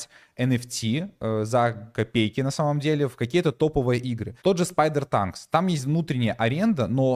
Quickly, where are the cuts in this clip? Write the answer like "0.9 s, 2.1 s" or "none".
4.4 s

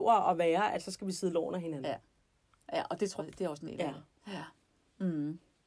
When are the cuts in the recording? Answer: 3.2 s, 3.6 s

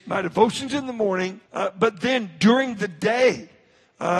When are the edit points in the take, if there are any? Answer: 1.5 s

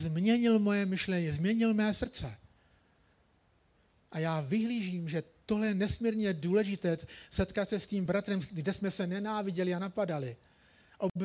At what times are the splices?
none

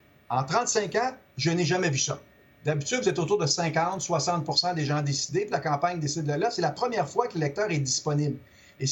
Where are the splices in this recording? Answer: none

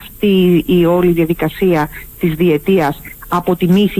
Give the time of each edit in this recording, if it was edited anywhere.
none

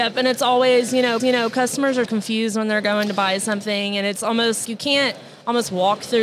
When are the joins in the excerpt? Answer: 1.2 s, 2.0 s, 4.6 s

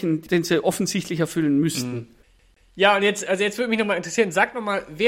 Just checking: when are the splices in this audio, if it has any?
2.2 s

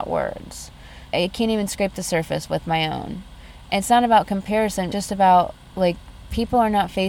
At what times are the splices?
1.1 s, 4.9 s

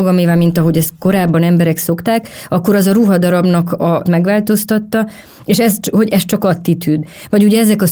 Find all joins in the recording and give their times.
4.1 s

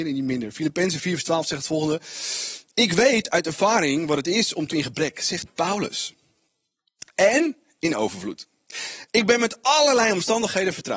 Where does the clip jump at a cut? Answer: 4.7 s

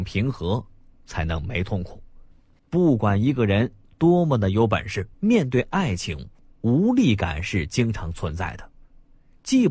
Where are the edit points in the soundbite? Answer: 5.1 s

